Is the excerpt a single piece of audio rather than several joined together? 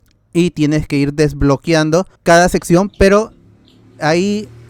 no; 1 cut; at 2.2 s

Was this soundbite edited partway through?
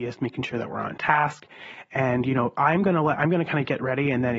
no; 0 cuts

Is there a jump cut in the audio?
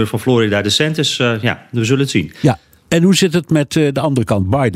no; 0 cuts

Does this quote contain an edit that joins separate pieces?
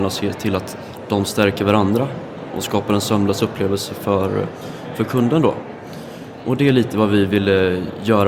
no; 0 cuts

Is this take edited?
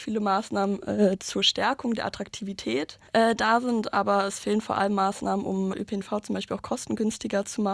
yes; 2 cuts; at 3.1 s, 5.7 s

